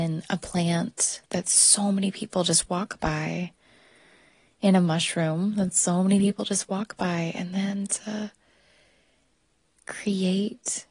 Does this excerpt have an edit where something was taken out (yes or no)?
no